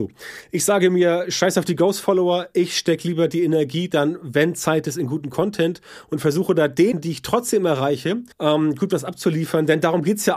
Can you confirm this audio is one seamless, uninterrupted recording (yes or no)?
no